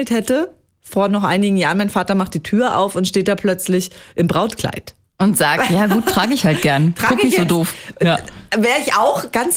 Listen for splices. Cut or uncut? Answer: uncut